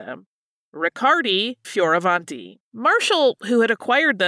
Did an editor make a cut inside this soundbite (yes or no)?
yes